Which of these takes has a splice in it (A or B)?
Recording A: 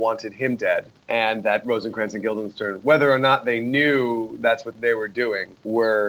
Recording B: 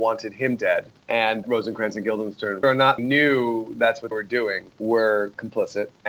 B